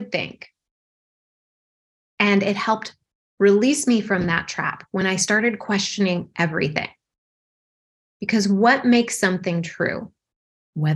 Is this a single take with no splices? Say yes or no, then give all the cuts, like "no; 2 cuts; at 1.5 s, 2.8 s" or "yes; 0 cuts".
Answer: yes; 0 cuts